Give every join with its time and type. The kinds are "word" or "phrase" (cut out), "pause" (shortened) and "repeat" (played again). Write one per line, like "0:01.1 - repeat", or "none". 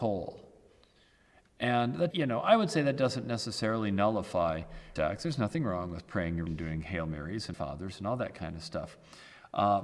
0:02.1 - word
0:05.0 - word
0:06.5 - word
0:07.5 - word